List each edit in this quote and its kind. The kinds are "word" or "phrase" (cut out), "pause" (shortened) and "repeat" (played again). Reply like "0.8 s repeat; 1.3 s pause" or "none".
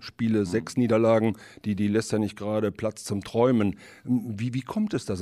none